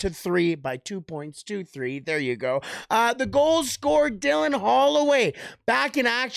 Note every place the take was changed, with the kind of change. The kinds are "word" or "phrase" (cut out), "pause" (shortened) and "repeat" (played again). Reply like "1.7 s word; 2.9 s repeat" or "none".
none